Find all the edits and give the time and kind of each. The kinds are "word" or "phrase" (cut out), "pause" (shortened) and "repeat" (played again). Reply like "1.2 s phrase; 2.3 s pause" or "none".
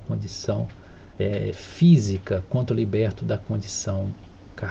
1.1 s pause